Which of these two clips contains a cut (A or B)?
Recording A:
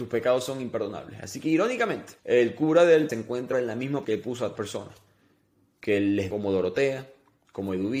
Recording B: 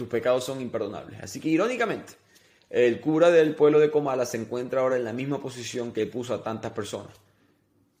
A